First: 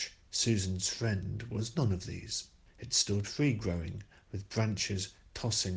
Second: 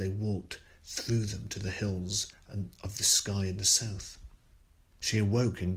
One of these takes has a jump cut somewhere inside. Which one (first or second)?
first